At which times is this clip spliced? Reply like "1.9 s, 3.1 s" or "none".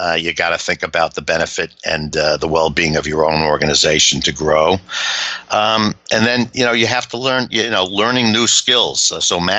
none